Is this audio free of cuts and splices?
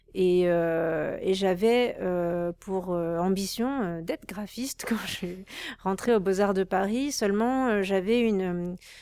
yes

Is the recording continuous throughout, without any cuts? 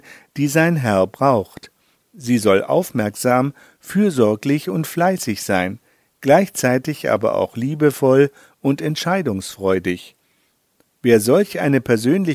yes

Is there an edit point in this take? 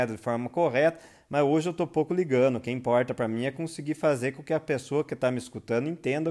no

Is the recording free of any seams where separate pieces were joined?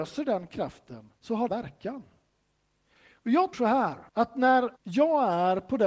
no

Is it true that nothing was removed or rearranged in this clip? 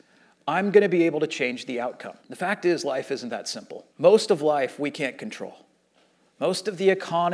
no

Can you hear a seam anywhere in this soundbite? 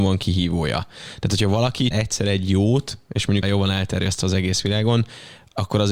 yes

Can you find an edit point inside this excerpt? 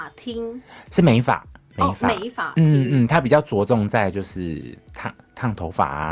no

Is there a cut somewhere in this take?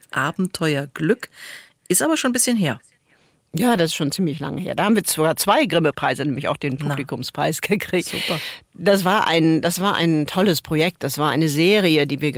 no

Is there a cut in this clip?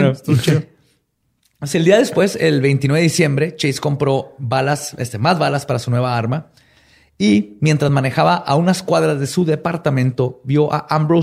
no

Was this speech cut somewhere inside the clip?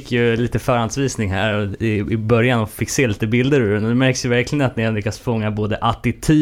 no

